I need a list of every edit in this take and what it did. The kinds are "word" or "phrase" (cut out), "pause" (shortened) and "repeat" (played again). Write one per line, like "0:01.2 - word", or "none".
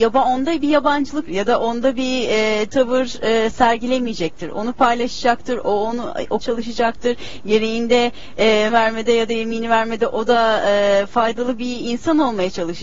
0:01.3 - word
0:02.7 - word
0:06.4 - phrase
0:08.7 - word